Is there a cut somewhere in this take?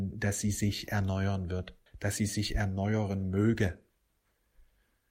yes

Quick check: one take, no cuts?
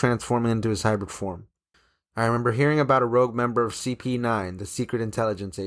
no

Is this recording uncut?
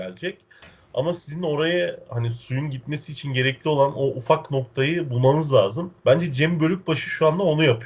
no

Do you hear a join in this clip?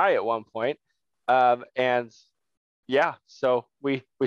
no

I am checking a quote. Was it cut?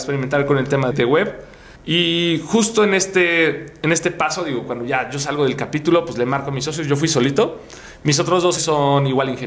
yes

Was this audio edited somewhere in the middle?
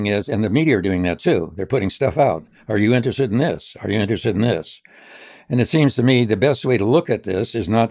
no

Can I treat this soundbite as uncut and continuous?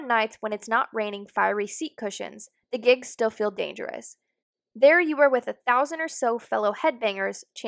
yes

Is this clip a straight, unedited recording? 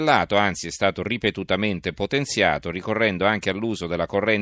yes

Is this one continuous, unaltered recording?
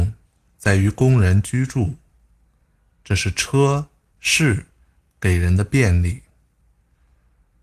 no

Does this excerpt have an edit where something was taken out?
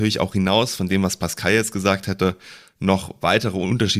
no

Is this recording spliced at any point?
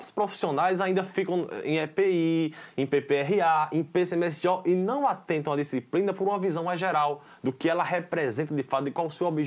no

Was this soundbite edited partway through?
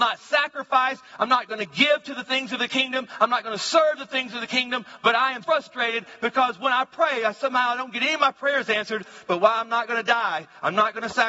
yes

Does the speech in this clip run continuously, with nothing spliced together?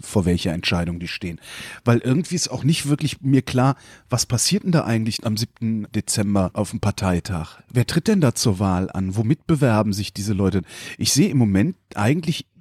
yes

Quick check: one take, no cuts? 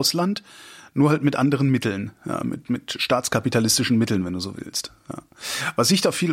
yes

